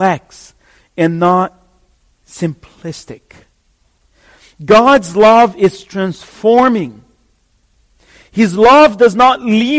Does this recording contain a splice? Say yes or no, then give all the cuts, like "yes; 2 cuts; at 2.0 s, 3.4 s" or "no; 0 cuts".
no; 0 cuts